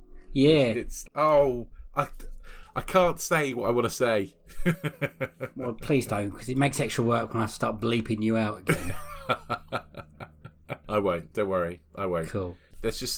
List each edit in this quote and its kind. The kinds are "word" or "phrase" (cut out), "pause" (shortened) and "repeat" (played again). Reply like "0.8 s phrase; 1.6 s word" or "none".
1.0 s word